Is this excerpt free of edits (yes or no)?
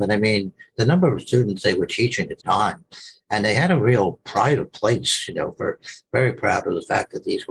no